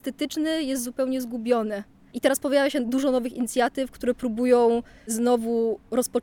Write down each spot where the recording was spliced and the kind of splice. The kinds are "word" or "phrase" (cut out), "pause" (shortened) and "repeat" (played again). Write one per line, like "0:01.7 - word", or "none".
none